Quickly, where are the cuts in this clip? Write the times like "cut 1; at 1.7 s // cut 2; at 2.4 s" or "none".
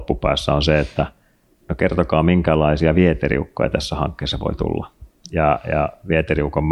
none